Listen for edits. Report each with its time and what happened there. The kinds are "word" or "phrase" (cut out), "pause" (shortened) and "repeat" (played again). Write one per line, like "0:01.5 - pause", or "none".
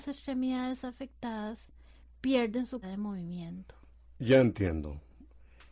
0:02.8 - word